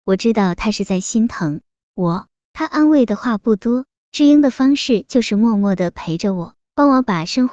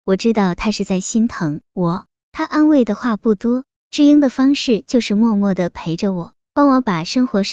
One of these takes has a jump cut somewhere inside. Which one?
second; 1 cut; at 1.6 s

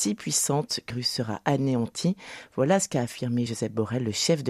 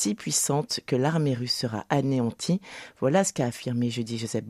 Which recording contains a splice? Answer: first; 2 cuts; at 0.9 s, 3.5 s

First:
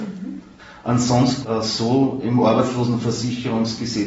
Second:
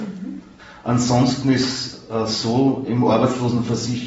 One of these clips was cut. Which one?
first; 1 cut; at 1.4 s

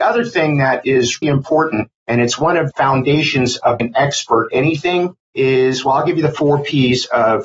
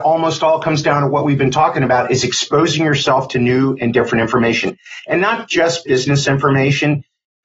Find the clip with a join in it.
first; 6 cuts; at 1.2 s, 2.0 s, 2.7 s, 3.8 s, 4.5 s, 5.2 s

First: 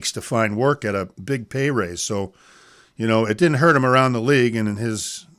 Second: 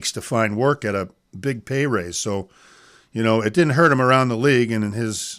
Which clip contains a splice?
first; 1 cut; at 1.1 s

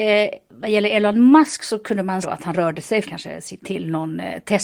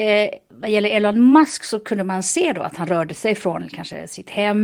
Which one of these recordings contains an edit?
first; 3 cuts; at 2.2 s, 3.0 s, 3.6 s

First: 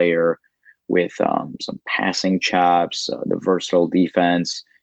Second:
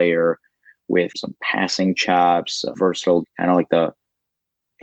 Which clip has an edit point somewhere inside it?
second; 3 cuts; at 1.1 s, 2.7 s, 3.2 s

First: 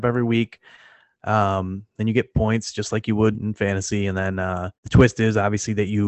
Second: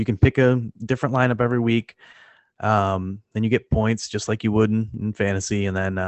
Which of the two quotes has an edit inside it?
first; 2 cuts; at 3.3 s, 4.7 s

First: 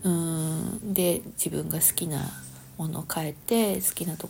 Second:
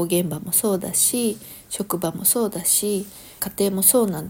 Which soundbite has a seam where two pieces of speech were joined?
second; 1 cut; at 3.4 s

